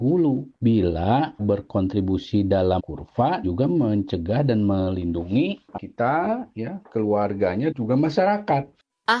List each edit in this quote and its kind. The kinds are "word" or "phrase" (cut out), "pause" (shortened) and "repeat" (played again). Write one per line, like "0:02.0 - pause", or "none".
0:01.4 - phrase
0:02.8 - word
0:03.4 - word
0:05.8 - word
0:07.7 - word